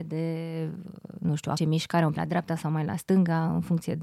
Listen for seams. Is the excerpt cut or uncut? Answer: cut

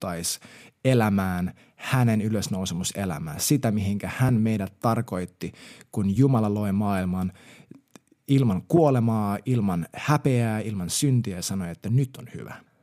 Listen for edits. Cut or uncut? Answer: uncut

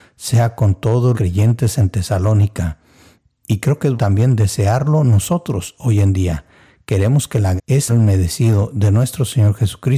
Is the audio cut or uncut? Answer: cut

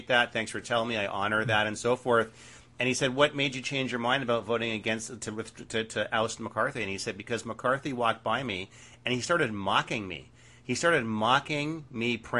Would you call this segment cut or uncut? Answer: uncut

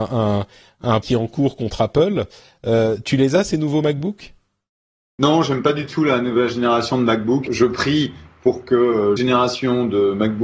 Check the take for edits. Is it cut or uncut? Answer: cut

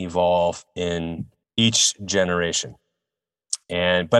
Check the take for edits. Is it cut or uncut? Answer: cut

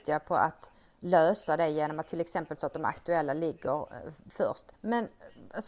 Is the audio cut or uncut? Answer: cut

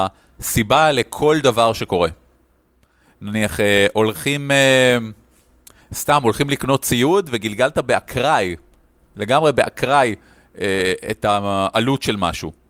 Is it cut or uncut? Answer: uncut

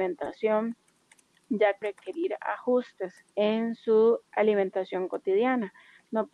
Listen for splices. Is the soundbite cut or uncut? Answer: cut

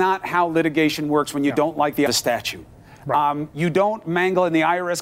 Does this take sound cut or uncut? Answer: cut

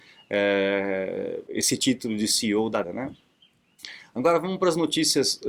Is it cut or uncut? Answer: cut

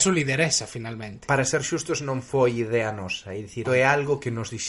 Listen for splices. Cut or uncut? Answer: cut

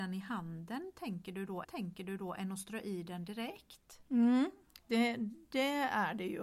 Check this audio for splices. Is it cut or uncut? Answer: cut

